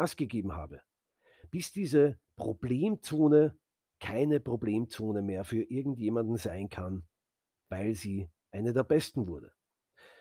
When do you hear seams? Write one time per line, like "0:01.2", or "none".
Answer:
none